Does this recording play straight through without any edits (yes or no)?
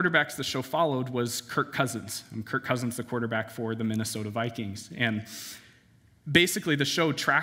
yes